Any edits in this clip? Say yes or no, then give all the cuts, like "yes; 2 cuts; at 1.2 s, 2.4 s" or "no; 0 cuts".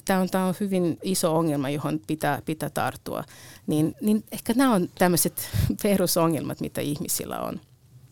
yes; 2 cuts; at 1.0 s, 3.9 s